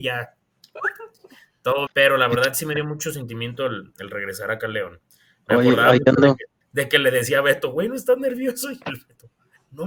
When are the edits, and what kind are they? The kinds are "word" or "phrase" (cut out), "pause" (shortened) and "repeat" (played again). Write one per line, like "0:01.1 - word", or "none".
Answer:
0:01.9 - word
0:06.6 - pause